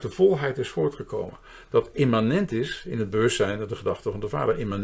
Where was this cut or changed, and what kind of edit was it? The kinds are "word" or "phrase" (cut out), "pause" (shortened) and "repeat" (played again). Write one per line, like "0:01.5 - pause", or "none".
none